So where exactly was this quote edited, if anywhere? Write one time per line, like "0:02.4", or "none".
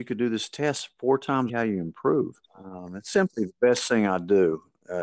0:01.5
0:02.4